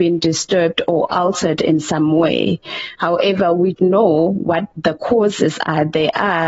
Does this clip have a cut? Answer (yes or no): yes